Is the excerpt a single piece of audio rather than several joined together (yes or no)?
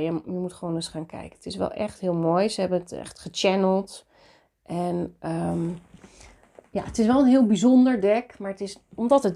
yes